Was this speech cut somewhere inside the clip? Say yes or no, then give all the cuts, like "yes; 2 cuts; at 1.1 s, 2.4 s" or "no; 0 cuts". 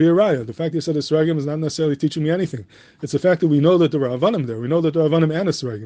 no; 0 cuts